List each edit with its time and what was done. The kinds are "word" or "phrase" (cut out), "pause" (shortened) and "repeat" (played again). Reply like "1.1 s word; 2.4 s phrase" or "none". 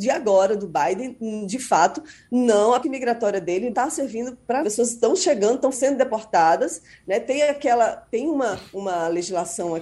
2.8 s word; 3.7 s word; 4.6 s phrase; 5.7 s word; 8.7 s pause